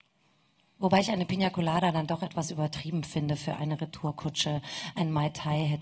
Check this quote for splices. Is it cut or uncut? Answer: uncut